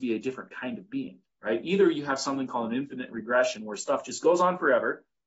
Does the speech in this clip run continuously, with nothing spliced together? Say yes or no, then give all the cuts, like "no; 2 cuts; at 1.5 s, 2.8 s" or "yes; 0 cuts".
yes; 0 cuts